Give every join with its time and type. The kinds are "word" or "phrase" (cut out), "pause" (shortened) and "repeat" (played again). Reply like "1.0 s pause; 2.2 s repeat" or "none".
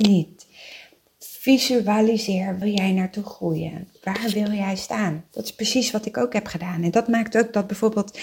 2.6 s phrase

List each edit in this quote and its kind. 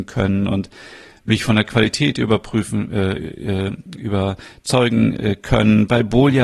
none

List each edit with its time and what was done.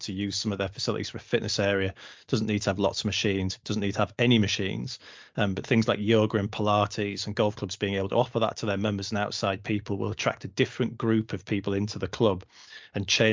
none

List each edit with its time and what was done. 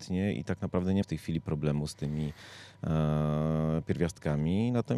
1.0 s word

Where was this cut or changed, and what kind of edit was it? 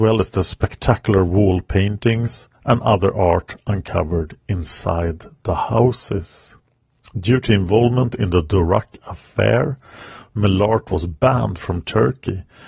2.6 s pause

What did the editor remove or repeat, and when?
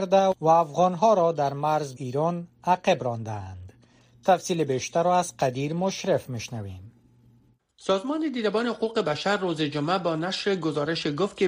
2.0 s word

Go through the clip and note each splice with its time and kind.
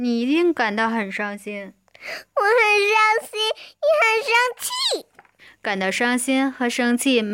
5.4 s pause

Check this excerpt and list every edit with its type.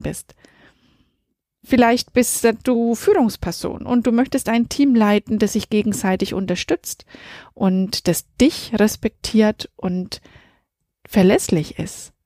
none

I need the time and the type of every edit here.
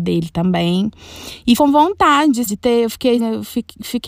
1.6 s word; 2.5 s word; 3.2 s word

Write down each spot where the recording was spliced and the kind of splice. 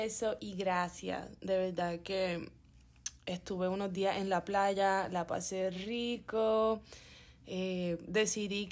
none

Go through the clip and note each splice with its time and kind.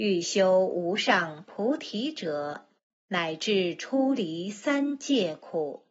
2.8 s pause

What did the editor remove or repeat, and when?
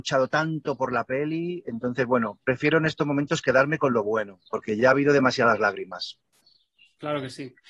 none

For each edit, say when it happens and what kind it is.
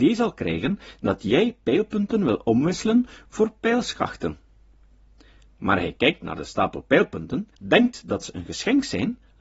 7.5 s pause

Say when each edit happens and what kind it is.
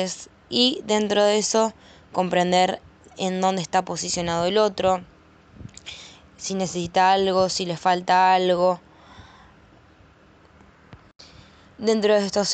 none

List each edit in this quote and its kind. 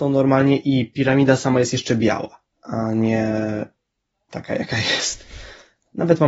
4.3 s word

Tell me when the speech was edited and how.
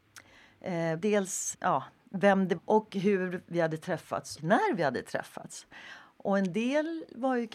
1.0 s word; 1.5 s word; 2.6 s word; 4.4 s word

